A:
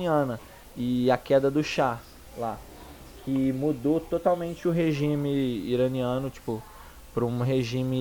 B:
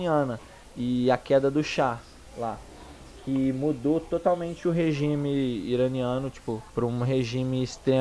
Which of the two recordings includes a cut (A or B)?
B